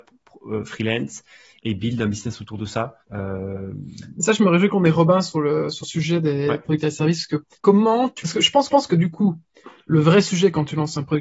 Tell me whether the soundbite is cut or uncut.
cut